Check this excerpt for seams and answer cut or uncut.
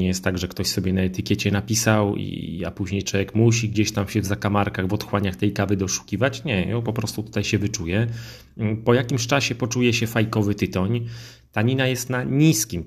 uncut